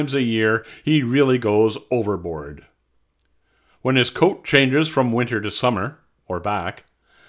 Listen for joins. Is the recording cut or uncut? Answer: uncut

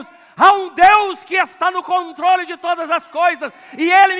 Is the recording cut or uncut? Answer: uncut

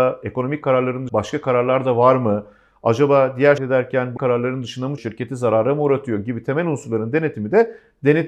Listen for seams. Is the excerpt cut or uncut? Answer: cut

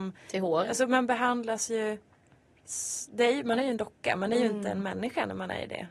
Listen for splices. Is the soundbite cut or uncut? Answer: uncut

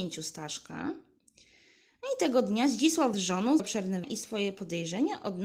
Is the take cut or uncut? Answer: cut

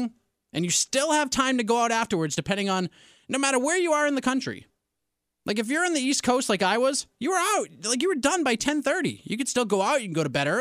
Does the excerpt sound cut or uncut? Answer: uncut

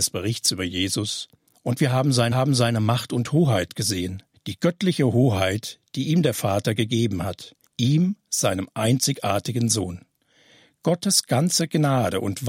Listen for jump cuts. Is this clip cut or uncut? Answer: cut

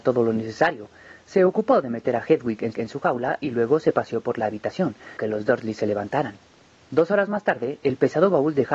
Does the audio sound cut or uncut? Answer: cut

